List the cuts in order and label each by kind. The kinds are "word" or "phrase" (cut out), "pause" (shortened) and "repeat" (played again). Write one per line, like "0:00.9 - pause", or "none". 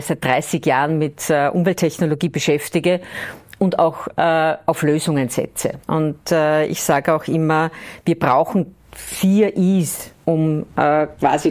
0:05.8 - pause
0:10.1 - pause